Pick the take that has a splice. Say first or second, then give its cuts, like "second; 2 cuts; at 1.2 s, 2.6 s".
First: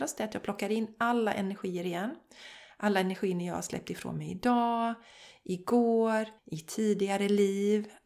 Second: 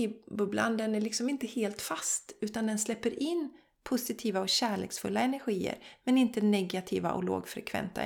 first; 1 cut; at 6.4 s